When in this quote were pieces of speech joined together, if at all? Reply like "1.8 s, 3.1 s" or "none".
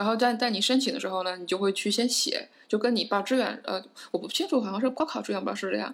none